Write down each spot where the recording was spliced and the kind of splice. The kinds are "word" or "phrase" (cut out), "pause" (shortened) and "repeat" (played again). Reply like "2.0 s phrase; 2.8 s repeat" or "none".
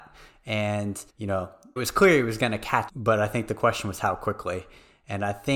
1.1 s pause; 1.8 s word; 2.9 s word